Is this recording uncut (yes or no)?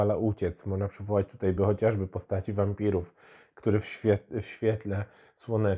yes